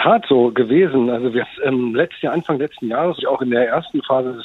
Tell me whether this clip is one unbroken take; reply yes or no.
no